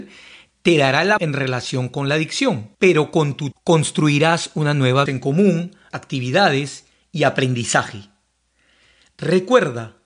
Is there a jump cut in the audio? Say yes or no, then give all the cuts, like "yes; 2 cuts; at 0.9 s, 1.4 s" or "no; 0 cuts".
yes; 5 cuts; at 1.2 s, 2.7 s, 3.5 s, 5.1 s, 5.9 s